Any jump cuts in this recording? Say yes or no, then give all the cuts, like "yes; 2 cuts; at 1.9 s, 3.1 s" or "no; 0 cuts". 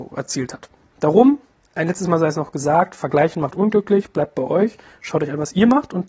no; 0 cuts